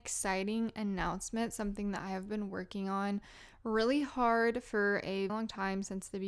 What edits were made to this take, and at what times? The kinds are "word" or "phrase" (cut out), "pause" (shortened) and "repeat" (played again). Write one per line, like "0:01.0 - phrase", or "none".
0:05.3 - word